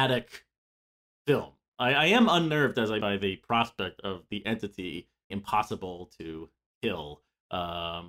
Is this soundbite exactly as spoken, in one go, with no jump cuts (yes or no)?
no